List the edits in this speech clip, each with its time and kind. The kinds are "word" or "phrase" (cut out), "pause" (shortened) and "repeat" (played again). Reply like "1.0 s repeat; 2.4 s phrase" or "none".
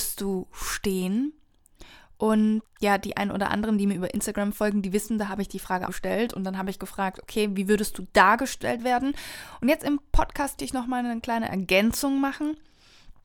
2.6 s word; 5.9 s phrase; 10.6 s word